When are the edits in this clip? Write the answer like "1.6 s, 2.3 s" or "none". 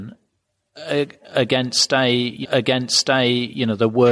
2.4 s